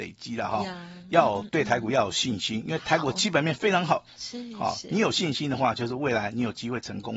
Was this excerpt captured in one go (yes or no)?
yes